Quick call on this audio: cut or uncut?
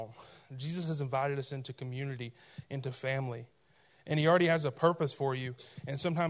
uncut